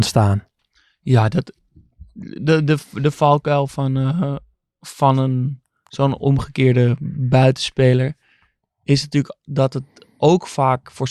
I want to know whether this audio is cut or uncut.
uncut